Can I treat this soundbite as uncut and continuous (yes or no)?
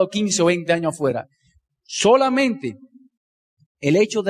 yes